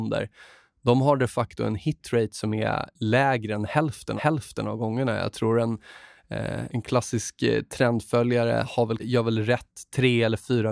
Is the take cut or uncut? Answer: cut